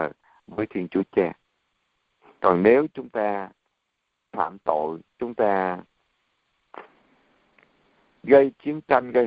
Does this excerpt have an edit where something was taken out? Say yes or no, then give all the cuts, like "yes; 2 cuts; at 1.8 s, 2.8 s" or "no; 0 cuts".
yes; 1 cut; at 5.1 s